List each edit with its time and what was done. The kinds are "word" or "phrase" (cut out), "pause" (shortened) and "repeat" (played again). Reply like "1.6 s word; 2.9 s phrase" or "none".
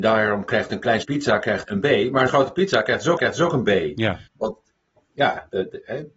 1.0 s word; 1.6 s word; 2.3 s word; 3.2 s repeat; 4.3 s pause